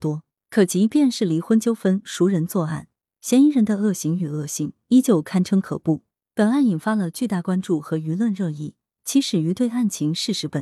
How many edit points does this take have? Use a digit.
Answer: 0